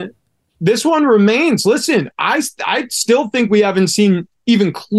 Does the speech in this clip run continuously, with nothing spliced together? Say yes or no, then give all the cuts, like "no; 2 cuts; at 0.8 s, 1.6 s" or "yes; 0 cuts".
yes; 0 cuts